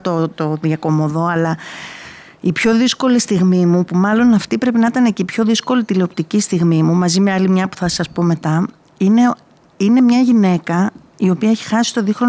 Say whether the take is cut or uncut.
uncut